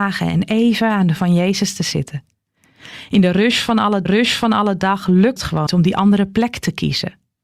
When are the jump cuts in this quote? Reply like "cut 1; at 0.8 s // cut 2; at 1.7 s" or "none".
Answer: cut 1; at 1.2 s // cut 2; at 4.1 s // cut 3; at 5.4 s // cut 4; at 5.7 s